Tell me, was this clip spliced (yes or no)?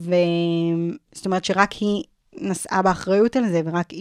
no